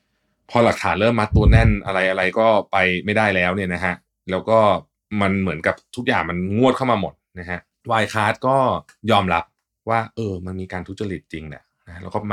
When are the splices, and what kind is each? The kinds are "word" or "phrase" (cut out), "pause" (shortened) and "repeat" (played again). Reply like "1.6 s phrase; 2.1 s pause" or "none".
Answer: none

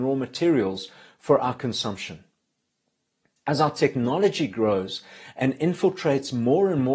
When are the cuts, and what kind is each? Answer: none

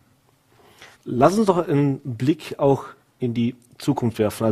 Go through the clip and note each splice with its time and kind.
0.9 s pause; 3.0 s pause

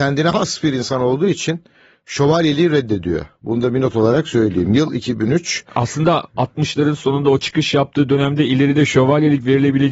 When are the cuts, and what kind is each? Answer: none

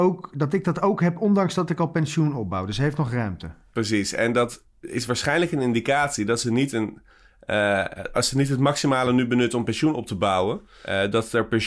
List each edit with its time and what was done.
none

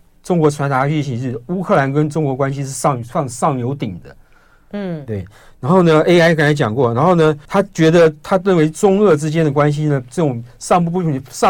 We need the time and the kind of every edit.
7.4 s pause

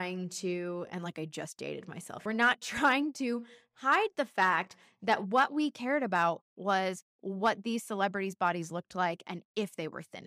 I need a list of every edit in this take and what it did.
2.3 s phrase; 7.1 s pause

